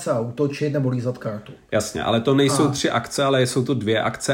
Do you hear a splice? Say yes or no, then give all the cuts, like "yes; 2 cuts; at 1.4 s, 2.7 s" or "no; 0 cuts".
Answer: no; 0 cuts